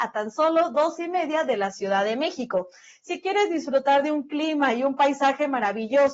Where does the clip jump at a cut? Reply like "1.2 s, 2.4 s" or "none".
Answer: 1.0 s

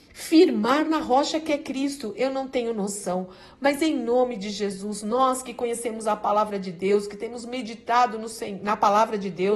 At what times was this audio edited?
none

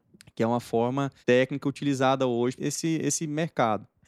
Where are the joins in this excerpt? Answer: 1.2 s, 2.6 s

